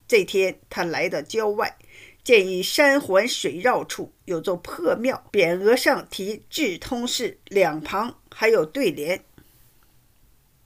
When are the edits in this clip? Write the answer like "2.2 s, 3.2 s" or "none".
5.3 s